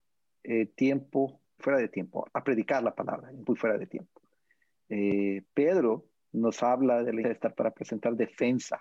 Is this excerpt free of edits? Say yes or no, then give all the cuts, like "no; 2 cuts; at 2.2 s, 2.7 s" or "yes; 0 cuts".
no; 5 cuts; at 1.6 s, 2.3 s, 3.5 s, 7.2 s, 7.5 s